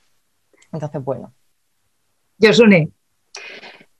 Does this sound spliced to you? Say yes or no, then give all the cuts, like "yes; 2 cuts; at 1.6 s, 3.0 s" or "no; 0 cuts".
no; 0 cuts